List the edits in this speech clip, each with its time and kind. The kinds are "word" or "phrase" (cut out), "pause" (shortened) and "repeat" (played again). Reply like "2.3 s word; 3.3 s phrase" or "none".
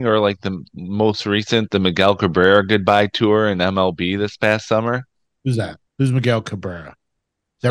5.9 s pause